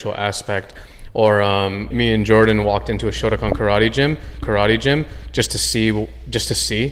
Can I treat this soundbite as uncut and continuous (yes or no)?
no